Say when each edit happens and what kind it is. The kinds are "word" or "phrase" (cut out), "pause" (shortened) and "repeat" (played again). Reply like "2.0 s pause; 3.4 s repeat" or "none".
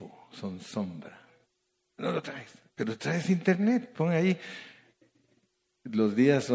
none